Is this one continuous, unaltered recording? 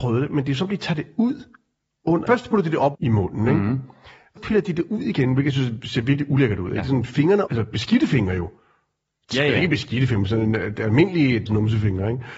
no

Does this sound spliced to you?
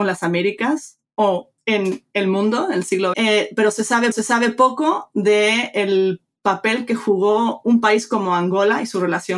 yes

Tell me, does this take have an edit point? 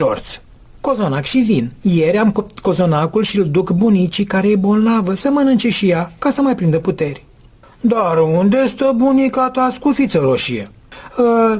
no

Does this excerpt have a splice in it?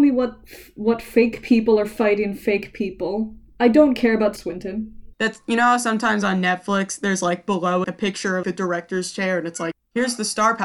yes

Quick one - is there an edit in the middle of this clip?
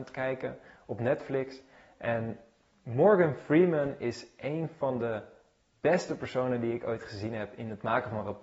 no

